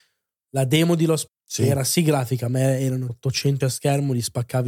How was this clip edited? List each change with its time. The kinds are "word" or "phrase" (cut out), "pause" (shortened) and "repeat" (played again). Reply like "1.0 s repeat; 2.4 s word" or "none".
1.3 s word; 3.1 s word; 3.6 s word